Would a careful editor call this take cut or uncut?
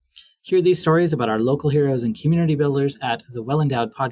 uncut